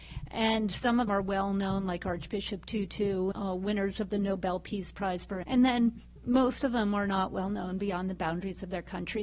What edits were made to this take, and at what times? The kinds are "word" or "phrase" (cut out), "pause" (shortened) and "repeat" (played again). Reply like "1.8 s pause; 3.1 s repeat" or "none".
1.1 s word; 3.3 s word; 5.4 s word